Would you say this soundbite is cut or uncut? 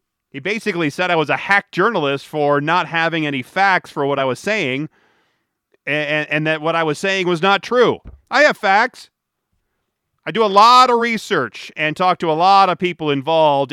uncut